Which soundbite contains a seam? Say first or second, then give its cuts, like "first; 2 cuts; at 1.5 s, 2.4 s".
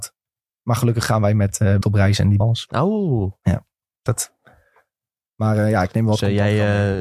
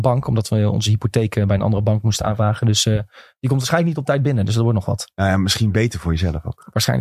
first; 3 cuts; at 1.8 s, 2.4 s, 4.1 s